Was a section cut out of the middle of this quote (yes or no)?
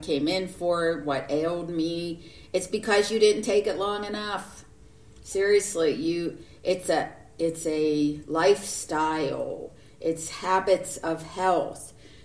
no